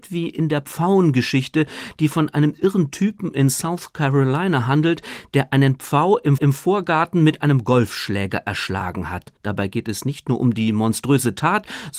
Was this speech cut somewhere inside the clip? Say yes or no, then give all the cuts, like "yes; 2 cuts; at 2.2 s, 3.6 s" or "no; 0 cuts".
yes; 2 cuts; at 6.4 s, 9.4 s